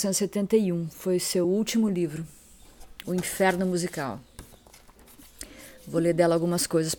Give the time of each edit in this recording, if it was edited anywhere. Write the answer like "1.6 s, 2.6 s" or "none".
none